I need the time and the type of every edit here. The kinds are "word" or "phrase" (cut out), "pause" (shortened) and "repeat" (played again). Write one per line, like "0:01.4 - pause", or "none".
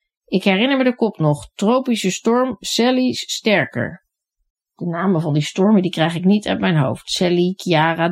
0:03.1 - word